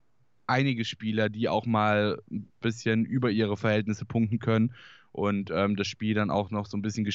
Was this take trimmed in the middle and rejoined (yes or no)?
no